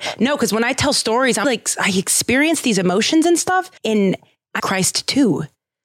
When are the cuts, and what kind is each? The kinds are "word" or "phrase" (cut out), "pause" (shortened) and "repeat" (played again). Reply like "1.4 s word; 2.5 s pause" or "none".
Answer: 1.4 s word; 3.8 s pause; 4.6 s phrase